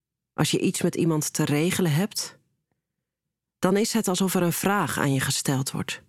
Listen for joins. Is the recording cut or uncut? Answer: uncut